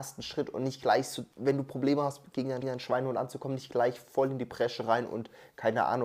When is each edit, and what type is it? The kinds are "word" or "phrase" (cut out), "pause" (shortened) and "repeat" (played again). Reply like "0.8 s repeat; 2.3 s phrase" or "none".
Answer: 1.3 s pause; 2.6 s repeat